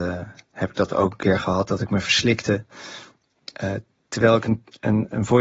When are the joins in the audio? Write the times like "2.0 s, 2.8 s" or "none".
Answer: none